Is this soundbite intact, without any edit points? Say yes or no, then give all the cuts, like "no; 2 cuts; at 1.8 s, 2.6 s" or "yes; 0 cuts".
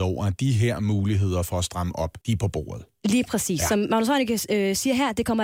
no; 1 cut; at 2.2 s